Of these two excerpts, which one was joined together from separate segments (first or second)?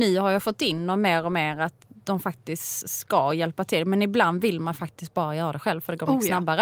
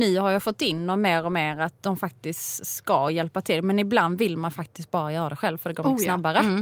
second